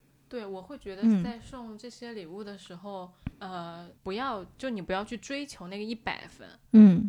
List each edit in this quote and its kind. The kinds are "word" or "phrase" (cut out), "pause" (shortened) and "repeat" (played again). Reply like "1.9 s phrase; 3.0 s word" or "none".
3.3 s pause; 4.0 s pause

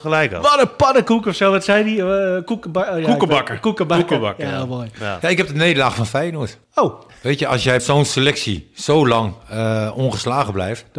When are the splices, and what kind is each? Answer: 6.6 s pause; 7.8 s word

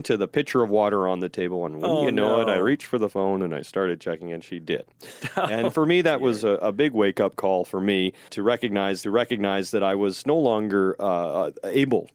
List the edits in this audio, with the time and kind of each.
8.3 s word; 9.0 s repeat

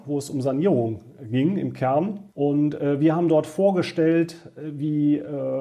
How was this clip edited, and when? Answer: 2.3 s pause

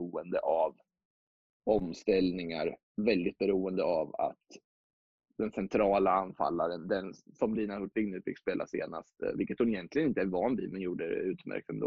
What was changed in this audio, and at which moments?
none

